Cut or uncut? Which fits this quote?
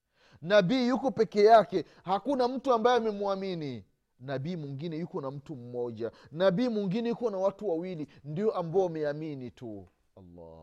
uncut